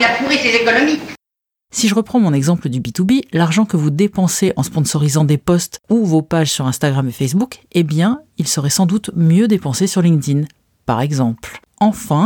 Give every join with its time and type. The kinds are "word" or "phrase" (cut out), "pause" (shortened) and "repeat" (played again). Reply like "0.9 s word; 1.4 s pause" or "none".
none

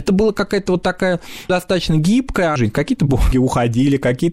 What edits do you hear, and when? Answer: 1.5 s word; 2.6 s word; 3.3 s word

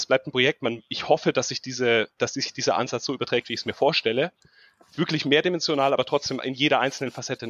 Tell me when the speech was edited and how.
none

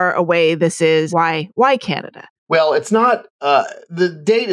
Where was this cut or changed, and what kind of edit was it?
1.1 s phrase; 2.4 s pause; 3.3 s pause

